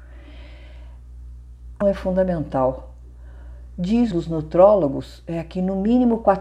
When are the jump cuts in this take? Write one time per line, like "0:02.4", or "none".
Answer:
0:01.8
0:04.1